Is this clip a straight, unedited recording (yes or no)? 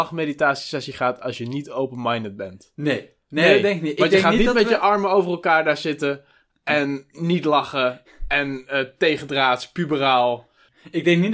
yes